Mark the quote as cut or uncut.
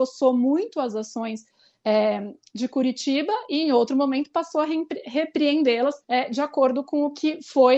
cut